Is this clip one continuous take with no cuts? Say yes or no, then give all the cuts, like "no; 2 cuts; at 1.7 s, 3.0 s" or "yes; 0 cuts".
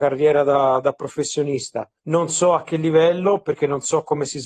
no; 1 cut; at 2.0 s